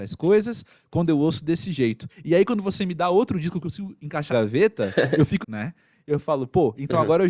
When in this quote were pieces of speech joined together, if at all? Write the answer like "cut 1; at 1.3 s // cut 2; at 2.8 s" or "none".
cut 1; at 2.1 s // cut 2; at 3.6 s // cut 3; at 4.3 s // cut 4; at 5.4 s